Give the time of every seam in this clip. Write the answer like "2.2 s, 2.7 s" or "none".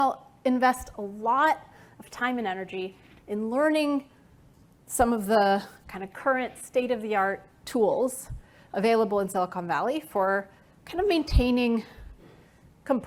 none